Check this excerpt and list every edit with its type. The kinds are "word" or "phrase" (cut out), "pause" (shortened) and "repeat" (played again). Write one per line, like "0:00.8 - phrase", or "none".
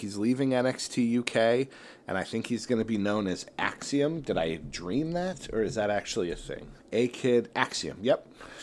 0:06.8 - pause